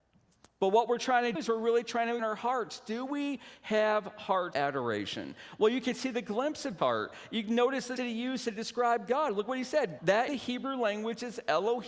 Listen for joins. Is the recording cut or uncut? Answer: cut